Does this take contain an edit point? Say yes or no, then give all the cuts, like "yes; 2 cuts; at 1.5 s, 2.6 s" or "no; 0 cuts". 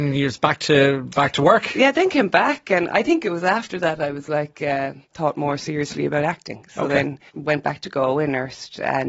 yes; 2 cuts; at 5.0 s, 7.3 s